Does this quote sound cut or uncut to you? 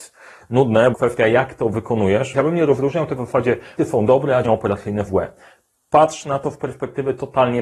cut